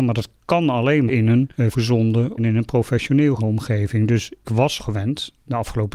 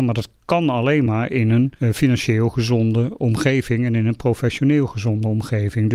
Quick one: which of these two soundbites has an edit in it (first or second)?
first